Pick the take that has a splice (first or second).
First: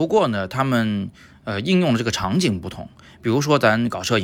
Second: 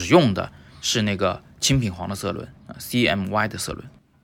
second